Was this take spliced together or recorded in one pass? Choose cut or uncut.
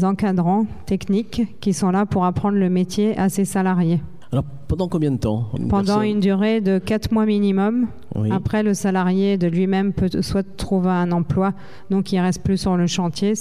cut